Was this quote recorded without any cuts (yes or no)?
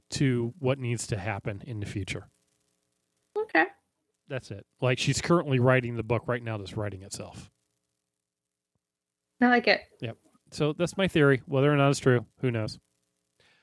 no